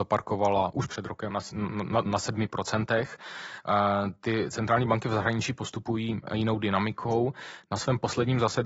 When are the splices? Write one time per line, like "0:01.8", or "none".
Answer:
0:01.3
0:02.1
0:06.3